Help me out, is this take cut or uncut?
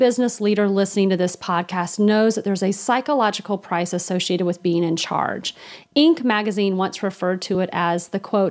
uncut